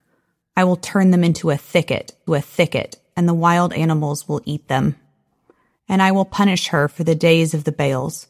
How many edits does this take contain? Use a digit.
1